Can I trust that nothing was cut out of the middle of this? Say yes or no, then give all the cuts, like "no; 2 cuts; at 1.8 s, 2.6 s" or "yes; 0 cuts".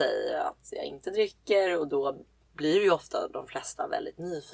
yes; 0 cuts